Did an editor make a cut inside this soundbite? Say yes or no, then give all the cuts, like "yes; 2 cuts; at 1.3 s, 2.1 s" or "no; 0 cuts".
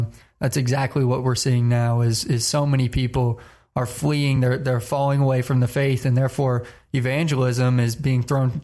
no; 0 cuts